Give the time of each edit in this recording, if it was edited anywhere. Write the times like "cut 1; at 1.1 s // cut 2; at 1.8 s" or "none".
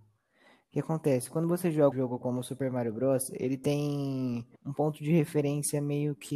cut 1; at 1.9 s // cut 2; at 4.6 s